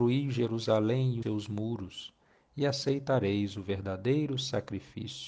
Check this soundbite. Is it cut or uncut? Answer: cut